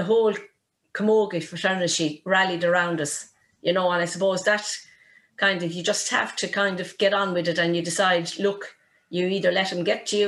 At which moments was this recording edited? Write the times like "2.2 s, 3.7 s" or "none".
none